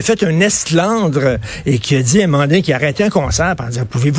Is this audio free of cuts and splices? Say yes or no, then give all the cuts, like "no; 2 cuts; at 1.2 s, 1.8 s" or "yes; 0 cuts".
yes; 0 cuts